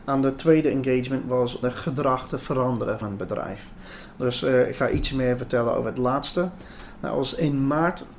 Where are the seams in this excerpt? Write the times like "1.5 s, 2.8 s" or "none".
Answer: 1.6 s, 3.0 s